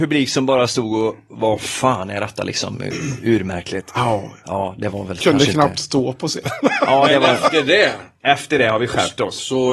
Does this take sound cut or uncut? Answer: uncut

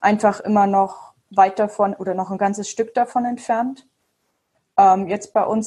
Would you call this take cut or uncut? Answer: uncut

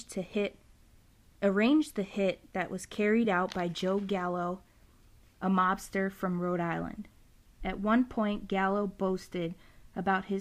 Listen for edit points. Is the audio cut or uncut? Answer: uncut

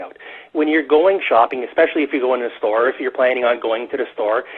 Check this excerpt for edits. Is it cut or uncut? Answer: uncut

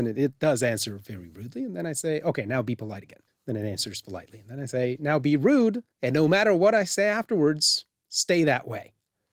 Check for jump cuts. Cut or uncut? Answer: cut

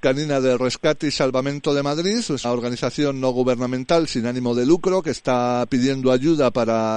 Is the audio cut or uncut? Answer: cut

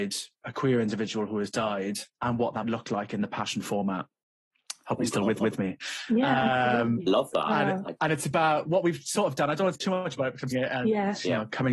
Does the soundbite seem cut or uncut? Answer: cut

